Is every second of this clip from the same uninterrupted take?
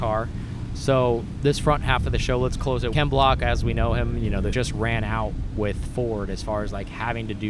no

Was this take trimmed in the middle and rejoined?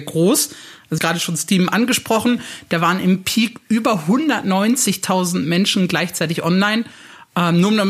yes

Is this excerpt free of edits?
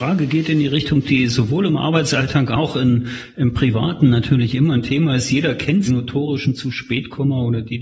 no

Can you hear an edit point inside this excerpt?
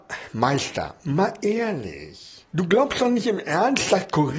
yes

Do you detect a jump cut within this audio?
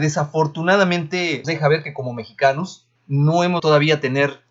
yes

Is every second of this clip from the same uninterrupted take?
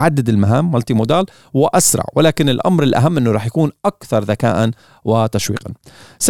yes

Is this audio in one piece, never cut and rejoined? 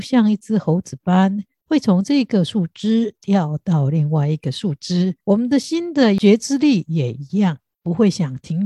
no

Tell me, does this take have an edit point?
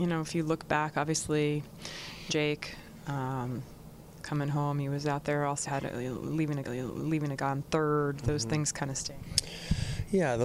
yes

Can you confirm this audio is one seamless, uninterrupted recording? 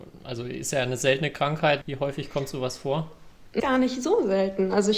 no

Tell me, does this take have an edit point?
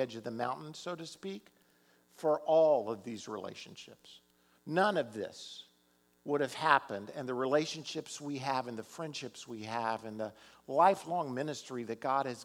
no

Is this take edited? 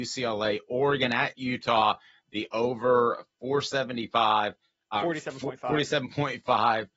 no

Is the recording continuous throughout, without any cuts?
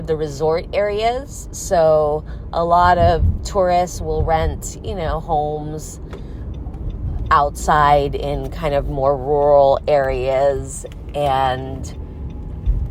yes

